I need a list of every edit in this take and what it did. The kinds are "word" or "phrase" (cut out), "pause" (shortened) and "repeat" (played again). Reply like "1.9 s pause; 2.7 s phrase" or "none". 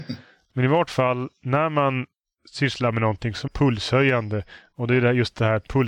3.5 s word